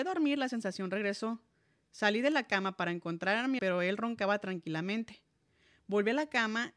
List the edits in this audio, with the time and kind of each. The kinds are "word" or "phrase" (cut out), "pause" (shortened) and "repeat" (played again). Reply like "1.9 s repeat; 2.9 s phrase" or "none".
3.6 s word